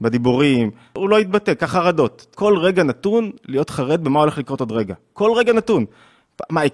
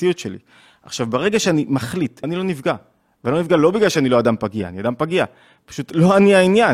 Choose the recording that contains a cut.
first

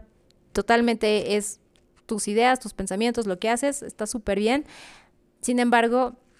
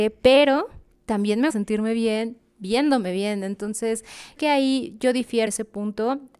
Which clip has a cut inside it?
second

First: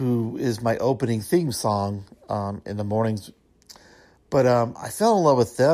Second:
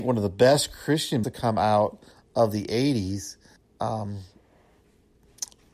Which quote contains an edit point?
second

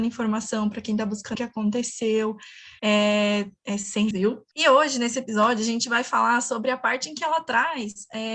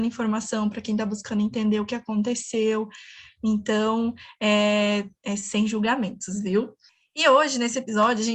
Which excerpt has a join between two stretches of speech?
first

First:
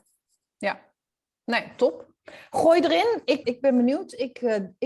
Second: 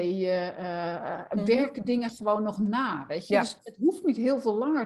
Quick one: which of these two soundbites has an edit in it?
first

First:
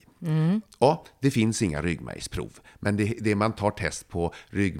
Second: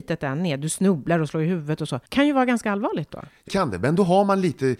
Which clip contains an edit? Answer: second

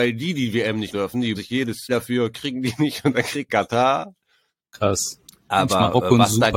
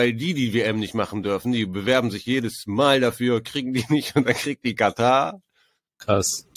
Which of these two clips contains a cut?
first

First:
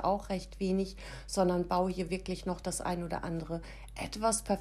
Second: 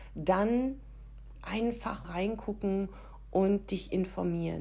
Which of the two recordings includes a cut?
second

